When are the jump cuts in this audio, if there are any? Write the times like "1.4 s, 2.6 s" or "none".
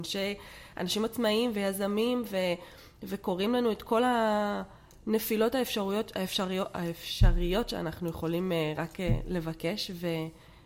none